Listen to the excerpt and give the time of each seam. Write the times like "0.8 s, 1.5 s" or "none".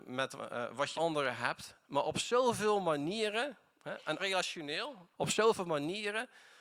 0.9 s, 4.2 s, 5.1 s